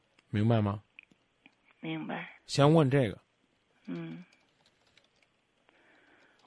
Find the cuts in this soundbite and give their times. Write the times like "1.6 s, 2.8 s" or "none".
2.4 s